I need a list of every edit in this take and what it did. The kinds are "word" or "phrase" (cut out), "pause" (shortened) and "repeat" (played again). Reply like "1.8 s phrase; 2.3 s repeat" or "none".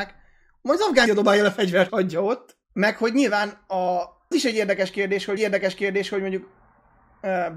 1.1 s word; 1.9 s word; 2.6 s pause; 4.3 s word; 5.4 s repeat